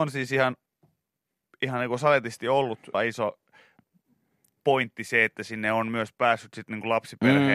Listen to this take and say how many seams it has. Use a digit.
1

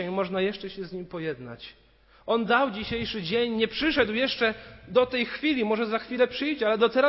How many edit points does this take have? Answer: 0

